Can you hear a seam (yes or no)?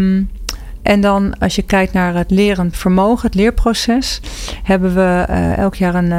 yes